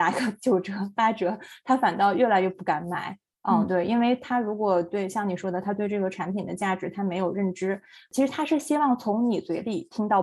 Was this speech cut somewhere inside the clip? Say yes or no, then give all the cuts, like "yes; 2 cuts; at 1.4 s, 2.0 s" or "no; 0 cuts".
no; 0 cuts